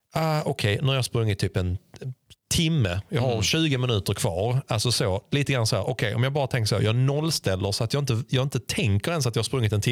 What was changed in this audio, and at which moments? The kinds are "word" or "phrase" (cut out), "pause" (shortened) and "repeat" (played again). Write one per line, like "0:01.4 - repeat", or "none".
none